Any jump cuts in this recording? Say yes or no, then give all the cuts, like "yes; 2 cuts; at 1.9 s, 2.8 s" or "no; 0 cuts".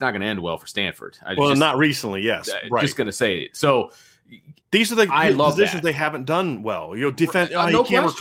yes; 1 cut; at 4.6 s